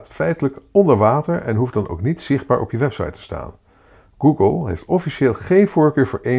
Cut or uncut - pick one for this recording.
uncut